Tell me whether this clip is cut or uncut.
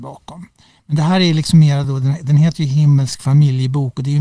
uncut